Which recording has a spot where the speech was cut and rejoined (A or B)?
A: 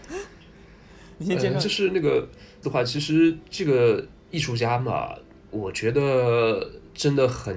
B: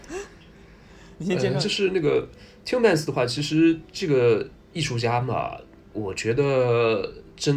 A